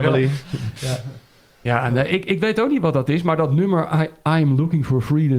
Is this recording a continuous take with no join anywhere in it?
yes; 0 cuts

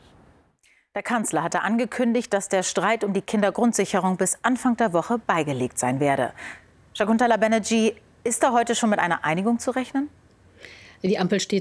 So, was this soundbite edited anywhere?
no; 0 cuts

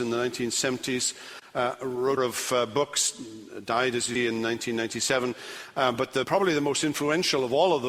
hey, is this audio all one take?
no; 3 cuts; at 2.2 s, 4.1 s, 6.2 s

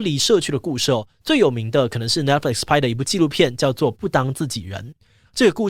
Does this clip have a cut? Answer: no; 0 cuts

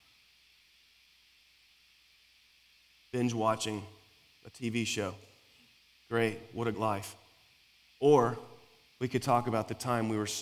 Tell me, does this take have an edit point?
yes; 1 cut; at 6.7 s

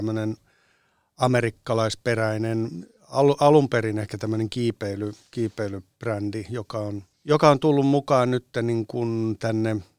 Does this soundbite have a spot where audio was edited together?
yes; 1 cut; at 7.1 s

